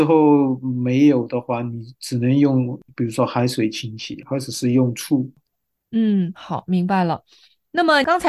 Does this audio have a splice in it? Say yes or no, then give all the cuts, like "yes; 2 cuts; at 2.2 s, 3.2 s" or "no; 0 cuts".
no; 0 cuts